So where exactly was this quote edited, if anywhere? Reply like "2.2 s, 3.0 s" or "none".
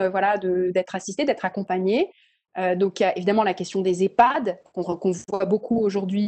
none